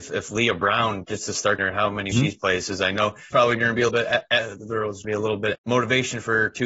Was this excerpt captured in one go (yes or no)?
no